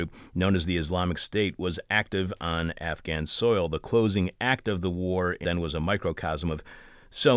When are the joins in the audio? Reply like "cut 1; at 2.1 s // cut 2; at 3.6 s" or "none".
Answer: cut 1; at 5.4 s